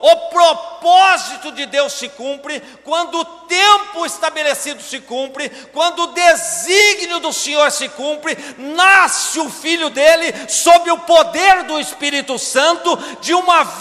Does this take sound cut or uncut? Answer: uncut